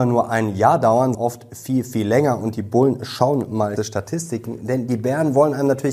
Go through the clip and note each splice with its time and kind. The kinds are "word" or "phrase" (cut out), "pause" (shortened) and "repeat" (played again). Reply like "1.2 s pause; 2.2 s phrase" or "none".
1.1 s word; 3.8 s phrase